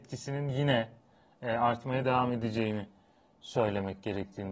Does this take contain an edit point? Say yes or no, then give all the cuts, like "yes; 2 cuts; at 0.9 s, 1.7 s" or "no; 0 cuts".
no; 0 cuts